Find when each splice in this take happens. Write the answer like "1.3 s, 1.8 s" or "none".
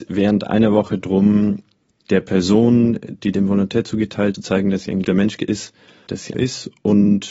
4.3 s, 5.0 s, 6.3 s

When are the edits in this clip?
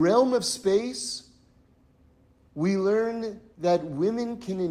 none

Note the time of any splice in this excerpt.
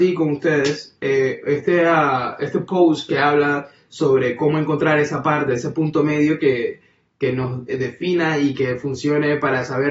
none

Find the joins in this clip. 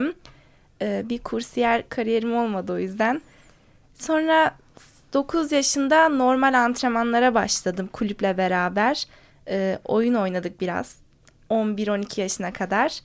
none

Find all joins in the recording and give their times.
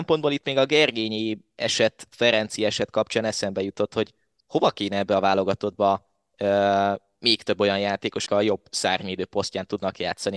8.3 s

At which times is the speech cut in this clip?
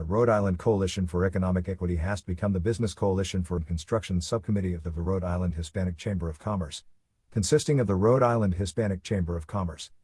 3.6 s

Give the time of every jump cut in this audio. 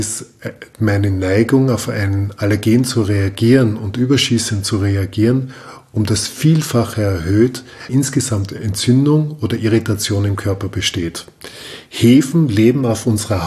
7.9 s

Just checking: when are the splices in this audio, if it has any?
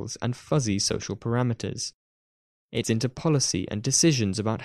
2.8 s

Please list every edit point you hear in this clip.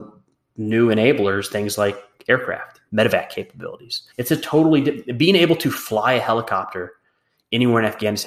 2.9 s, 4.1 s

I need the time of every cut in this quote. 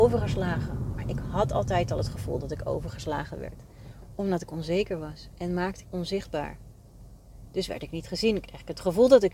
5.8 s

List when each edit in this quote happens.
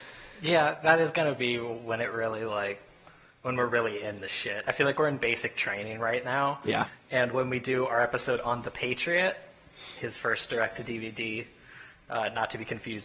none

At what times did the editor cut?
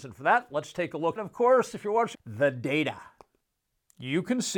1.2 s, 2.1 s

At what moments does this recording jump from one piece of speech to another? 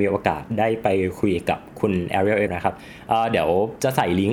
2.5 s

